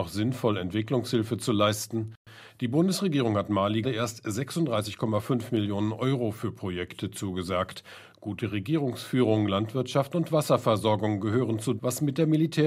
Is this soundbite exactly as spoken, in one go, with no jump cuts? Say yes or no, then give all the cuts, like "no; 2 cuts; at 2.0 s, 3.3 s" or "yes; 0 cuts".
no; 2 cuts; at 3.8 s, 11.8 s